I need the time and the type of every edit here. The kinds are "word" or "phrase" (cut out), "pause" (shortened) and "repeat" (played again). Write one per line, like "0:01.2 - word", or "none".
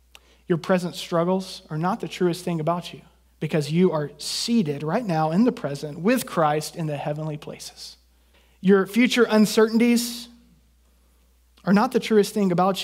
0:03.2 - pause
0:08.3 - pause